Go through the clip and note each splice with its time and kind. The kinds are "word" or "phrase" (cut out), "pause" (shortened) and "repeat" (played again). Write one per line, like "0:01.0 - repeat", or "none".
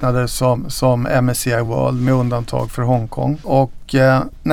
none

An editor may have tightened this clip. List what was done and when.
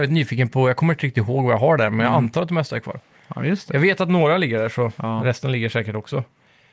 none

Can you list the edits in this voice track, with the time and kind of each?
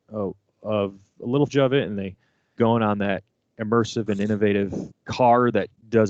0:01.5 - word
0:02.6 - word
0:04.9 - word

